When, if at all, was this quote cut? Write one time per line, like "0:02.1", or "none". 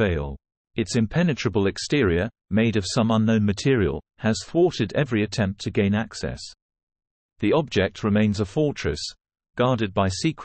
0:02.4
0:04.1